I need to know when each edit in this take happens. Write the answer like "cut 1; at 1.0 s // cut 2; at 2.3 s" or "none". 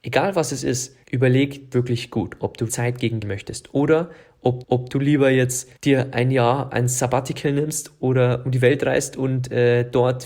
cut 1; at 1.0 s // cut 2; at 1.7 s // cut 3; at 2.7 s // cut 4; at 3.2 s // cut 5; at 4.6 s // cut 6; at 5.8 s